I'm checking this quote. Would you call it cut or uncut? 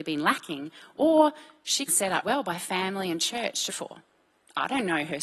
cut